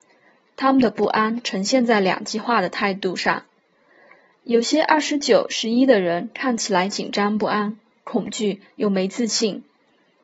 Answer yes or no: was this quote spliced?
no